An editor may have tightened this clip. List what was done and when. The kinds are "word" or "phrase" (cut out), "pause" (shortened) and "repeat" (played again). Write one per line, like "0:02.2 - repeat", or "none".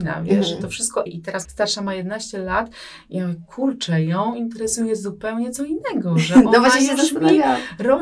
0:01.1 - word
0:01.4 - phrase

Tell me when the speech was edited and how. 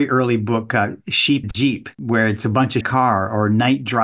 0:01.4 - phrase
0:01.9 - pause
0:02.8 - phrase

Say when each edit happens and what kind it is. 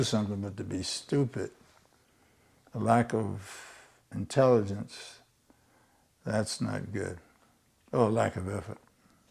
none

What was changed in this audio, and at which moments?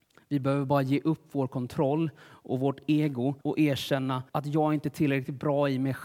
0:03.4 - pause
0:04.3 - pause

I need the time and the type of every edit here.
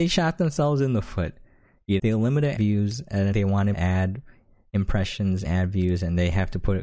0:02.0 - word
0:02.6 - word
0:03.3 - word
0:03.7 - word
0:05.4 - word

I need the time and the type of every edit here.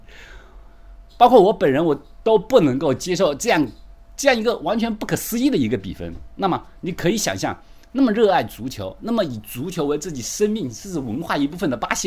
0:01.1 - pause

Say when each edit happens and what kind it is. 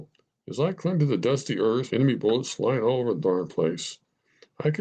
0:01.9 - word

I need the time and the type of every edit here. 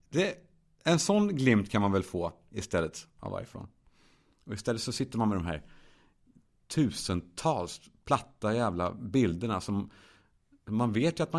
none

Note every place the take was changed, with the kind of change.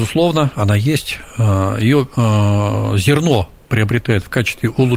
none

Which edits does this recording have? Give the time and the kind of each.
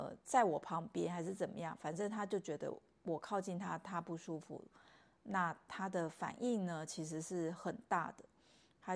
none

